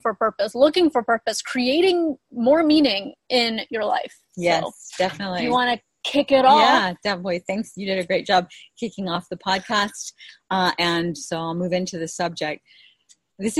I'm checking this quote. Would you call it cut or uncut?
uncut